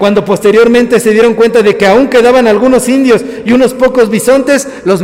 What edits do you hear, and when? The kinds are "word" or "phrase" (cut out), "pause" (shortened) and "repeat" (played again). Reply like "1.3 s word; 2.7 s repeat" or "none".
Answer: none